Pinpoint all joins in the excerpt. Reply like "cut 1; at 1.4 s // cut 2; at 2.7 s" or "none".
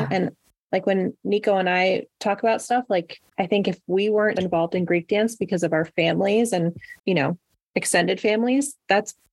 cut 1; at 3.3 s // cut 2; at 4.4 s // cut 3; at 7.0 s